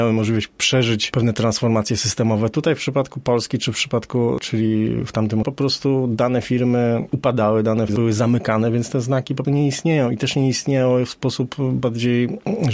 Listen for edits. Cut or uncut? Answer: cut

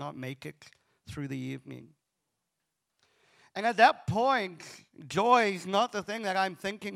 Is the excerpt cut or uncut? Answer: uncut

